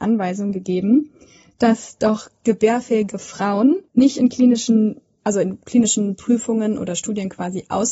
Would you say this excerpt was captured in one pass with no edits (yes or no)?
yes